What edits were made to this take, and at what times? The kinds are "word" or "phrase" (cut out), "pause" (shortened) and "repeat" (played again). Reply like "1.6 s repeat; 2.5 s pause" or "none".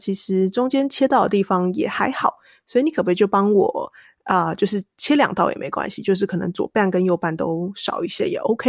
none